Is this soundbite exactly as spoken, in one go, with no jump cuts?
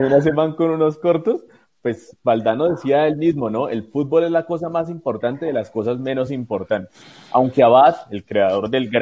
yes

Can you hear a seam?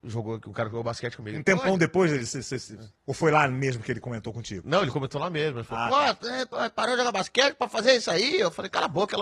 yes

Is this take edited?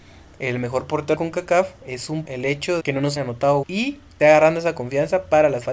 yes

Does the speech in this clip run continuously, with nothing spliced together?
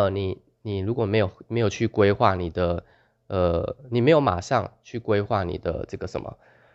yes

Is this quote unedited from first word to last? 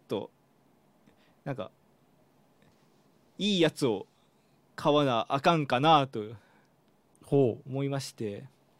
yes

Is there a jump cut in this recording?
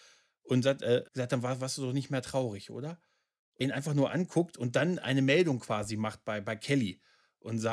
yes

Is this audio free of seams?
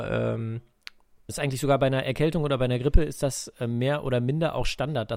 no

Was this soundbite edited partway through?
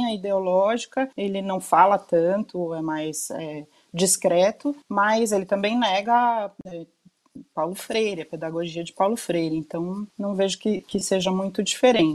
yes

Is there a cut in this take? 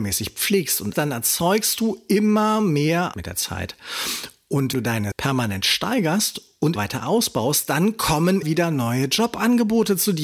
yes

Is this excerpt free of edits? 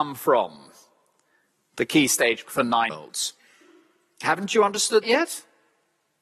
no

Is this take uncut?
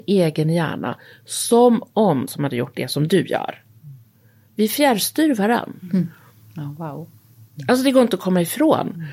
no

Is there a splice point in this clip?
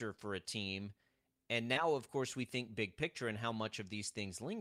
no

